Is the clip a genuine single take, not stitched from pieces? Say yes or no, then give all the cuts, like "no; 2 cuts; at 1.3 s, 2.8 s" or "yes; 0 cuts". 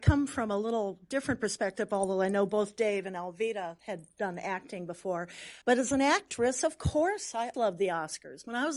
no; 3 cuts; at 3.8 s, 5.6 s, 7.5 s